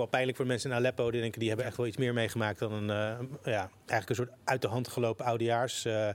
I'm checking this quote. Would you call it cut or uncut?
uncut